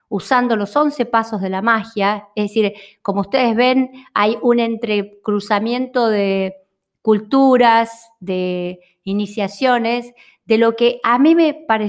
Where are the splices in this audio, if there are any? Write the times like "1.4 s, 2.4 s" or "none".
none